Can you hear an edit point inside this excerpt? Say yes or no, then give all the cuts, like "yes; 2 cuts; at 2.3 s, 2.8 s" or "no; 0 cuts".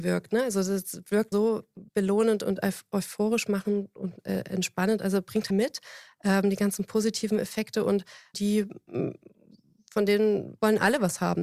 yes; 4 cuts; at 1.3 s, 1.9 s, 5.5 s, 8.3 s